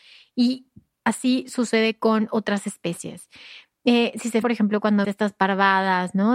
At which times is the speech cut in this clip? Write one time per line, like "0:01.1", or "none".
0:04.4
0:05.0

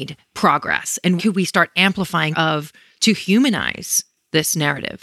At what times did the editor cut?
0:01.2
0:02.3

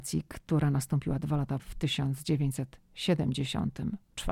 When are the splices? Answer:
0:01.6

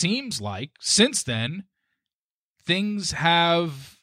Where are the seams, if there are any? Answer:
none

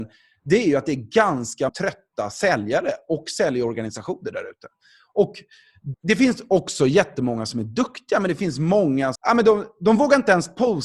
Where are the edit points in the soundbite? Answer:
0:01.7
0:05.9
0:09.2

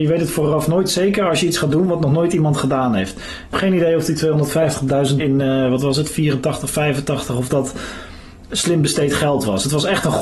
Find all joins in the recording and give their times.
0:03.5
0:05.2

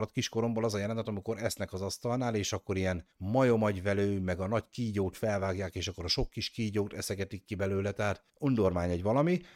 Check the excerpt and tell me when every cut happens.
0:03.1
0:08.3

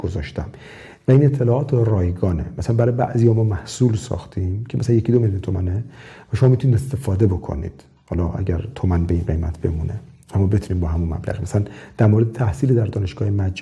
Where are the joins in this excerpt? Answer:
none

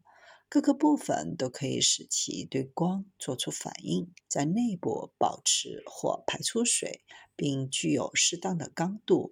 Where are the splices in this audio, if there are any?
0:04.2

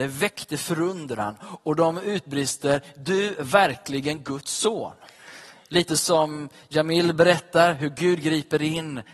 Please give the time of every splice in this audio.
none

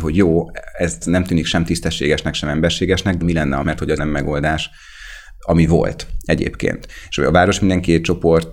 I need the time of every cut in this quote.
0:01.0
0:03.2
0:03.6
0:04.0

